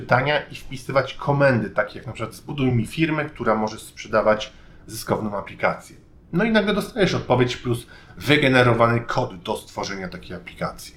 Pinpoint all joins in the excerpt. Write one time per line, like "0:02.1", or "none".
none